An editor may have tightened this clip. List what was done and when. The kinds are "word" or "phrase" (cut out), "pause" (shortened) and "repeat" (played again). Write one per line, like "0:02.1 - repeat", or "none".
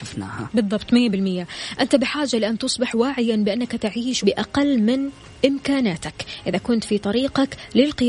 0:04.2 - word